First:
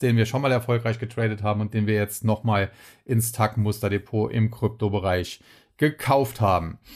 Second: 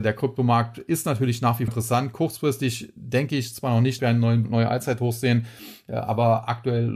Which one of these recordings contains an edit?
second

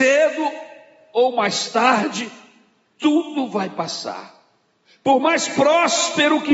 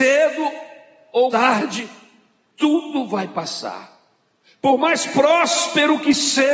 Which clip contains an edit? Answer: second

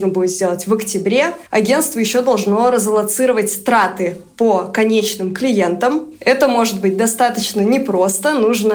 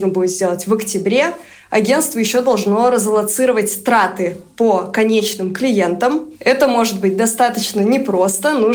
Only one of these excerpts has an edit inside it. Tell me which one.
first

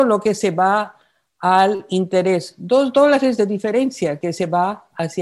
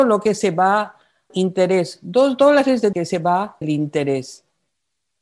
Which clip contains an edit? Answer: second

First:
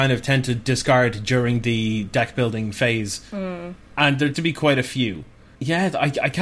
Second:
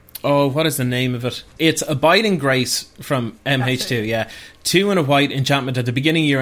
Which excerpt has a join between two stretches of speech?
first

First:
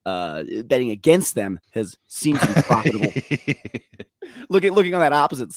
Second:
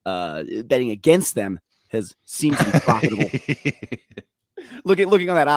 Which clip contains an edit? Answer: first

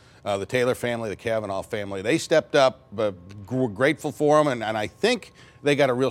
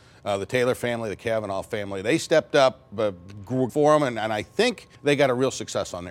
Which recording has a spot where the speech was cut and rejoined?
second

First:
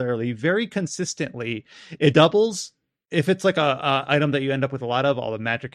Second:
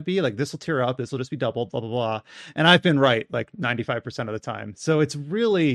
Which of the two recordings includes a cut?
first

